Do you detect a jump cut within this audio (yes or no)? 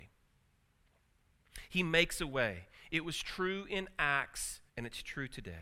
yes